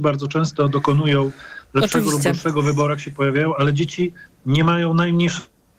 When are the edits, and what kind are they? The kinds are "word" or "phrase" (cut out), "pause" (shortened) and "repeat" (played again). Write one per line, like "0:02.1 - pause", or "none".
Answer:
none

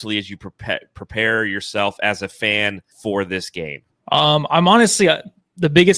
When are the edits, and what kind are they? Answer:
0:02.9 - pause
0:03.9 - pause

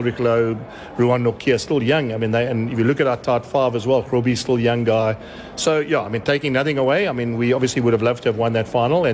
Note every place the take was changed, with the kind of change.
none

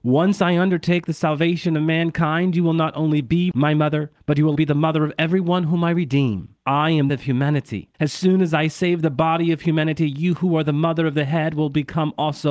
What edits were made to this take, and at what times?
0:04.5 - word
0:06.6 - pause
0:07.1 - phrase
0:07.9 - pause

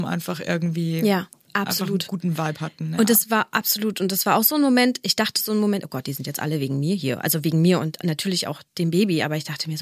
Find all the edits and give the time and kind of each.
none

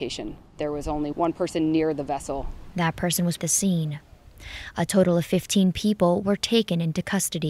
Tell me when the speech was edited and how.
0:01.1 - word
0:03.4 - phrase

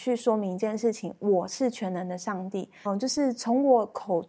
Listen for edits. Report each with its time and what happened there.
0:02.9 - phrase

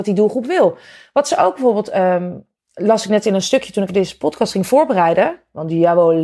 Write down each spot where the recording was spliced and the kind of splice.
0:03.9 - word

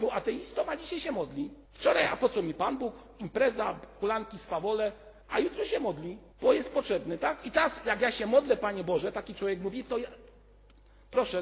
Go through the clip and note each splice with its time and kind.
0:01.7 - pause
0:05.2 - pause
0:06.3 - pause

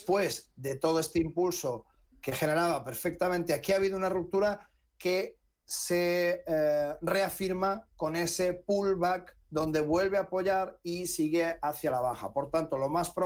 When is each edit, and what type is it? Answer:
0:09.4 - pause

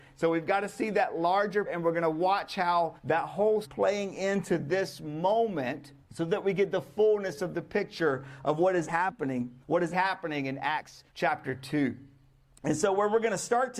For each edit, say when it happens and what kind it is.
0:01.7 - word
0:03.0 - pause
0:03.6 - phrase
0:06.0 - pause
0:08.9 - word
0:09.6 - pause
0:09.9 - word
0:11.1 - pause

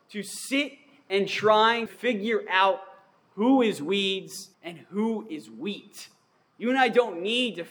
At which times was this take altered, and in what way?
0:01.9 - word
0:04.5 - pause

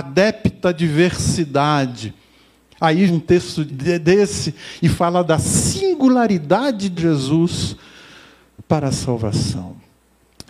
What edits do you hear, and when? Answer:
0:03.1 - word
0:03.7 - word
0:07.0 - word

